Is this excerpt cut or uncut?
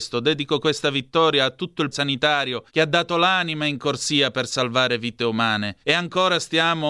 cut